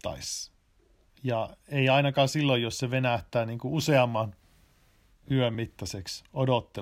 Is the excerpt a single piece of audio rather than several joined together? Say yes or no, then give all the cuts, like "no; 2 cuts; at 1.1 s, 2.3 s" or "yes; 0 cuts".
yes; 0 cuts